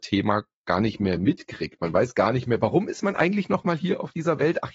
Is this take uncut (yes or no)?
yes